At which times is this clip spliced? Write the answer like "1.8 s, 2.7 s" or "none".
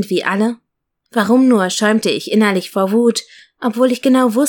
none